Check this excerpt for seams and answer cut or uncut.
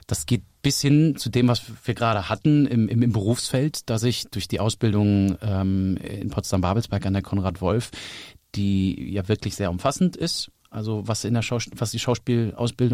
uncut